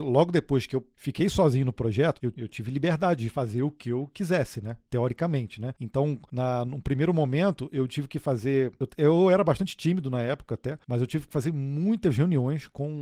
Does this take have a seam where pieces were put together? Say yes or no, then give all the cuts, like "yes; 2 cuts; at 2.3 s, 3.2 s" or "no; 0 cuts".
no; 0 cuts